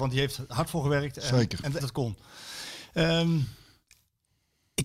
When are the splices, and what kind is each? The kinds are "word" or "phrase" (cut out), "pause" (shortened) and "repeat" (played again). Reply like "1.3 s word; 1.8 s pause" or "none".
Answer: 1.8 s word